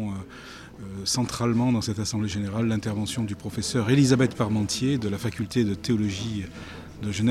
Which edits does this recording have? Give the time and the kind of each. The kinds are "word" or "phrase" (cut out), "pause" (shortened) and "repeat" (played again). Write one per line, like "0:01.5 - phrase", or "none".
none

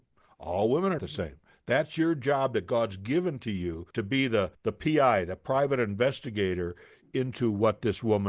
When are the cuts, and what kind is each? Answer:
0:01.0 - word
0:03.9 - pause
0:04.5 - pause

